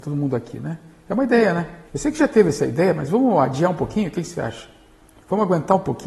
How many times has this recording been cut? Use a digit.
1